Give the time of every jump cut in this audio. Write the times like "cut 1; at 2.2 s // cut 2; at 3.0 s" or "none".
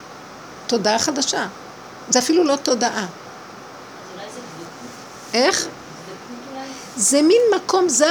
none